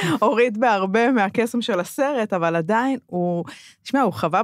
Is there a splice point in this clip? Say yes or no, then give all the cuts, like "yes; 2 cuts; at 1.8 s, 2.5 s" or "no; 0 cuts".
no; 0 cuts